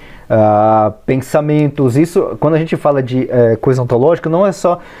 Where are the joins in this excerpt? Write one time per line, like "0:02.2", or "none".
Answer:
none